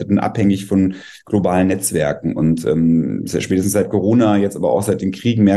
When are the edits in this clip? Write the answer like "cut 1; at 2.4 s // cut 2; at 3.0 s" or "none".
none